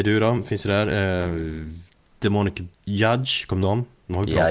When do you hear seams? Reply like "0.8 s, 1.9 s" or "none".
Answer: 2.7 s, 3.6 s